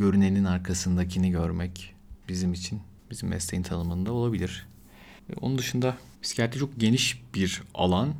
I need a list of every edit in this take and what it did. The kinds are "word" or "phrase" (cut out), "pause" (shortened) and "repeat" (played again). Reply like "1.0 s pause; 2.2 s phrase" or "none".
3.0 s pause; 5.2 s pause; 6.1 s pause